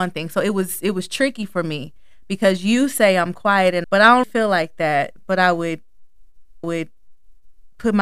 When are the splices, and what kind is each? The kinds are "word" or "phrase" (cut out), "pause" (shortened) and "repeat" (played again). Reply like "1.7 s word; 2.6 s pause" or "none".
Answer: 3.8 s phrase; 4.2 s word; 6.6 s repeat